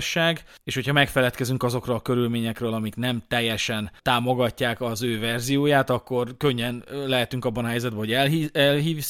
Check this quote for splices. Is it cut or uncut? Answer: uncut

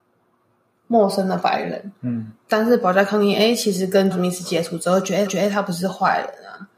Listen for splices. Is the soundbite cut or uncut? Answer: cut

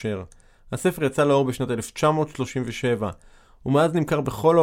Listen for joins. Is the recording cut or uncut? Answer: uncut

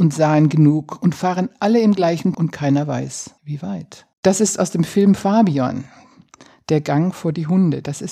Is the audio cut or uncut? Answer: cut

